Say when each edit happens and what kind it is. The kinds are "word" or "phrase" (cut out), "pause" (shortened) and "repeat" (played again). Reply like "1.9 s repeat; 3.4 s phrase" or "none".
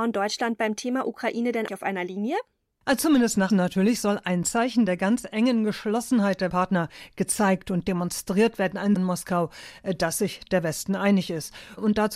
1.7 s word; 3.5 s word; 6.5 s word; 9.0 s phrase